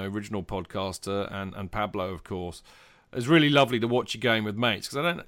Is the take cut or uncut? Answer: uncut